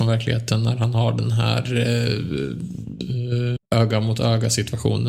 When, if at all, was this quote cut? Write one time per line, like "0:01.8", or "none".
0:03.6

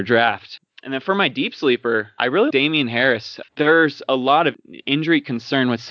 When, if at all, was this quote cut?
0:02.2
0:02.5
0:03.5

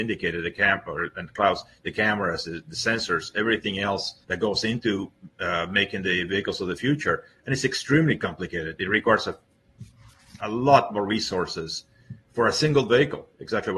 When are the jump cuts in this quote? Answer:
0:04.2
0:12.2

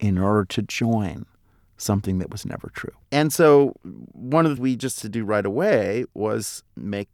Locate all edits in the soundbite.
0:03.0
0:04.6
0:05.0

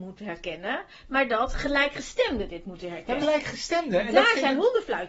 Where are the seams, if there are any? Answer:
0:03.2

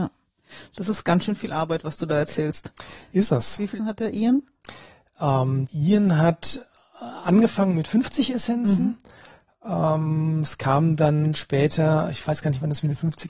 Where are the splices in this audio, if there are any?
0:03.8
0:05.7

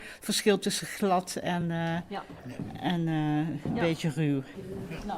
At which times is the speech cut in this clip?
none

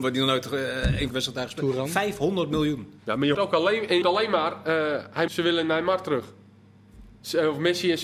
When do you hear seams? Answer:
0:01.1
0:03.3
0:04.0
0:05.3

